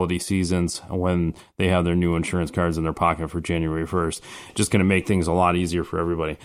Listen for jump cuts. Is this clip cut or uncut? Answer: uncut